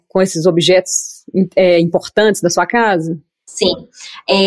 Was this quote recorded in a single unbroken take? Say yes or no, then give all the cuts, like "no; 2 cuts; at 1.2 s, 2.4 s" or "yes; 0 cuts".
yes; 0 cuts